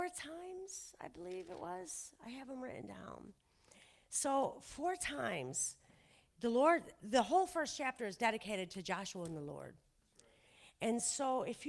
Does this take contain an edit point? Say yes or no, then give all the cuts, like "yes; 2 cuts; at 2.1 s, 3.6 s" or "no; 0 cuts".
no; 0 cuts